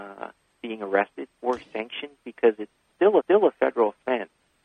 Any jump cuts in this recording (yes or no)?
yes